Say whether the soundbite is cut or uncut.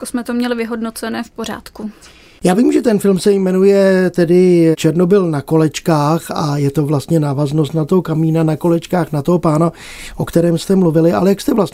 uncut